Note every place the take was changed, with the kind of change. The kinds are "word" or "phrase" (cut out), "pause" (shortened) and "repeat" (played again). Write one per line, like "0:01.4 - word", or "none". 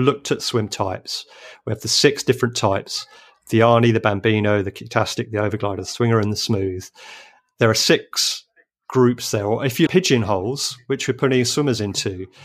0:09.9 - word